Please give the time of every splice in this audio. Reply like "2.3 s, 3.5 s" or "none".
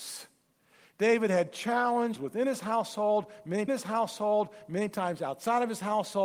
2.2 s, 3.7 s